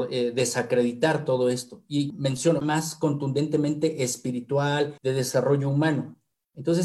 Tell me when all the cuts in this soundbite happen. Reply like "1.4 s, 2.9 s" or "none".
2.1 s, 2.6 s, 5.0 s